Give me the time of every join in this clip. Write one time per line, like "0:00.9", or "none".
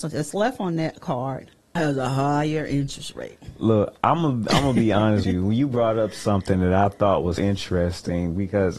0:01.8
0:05.2
0:07.4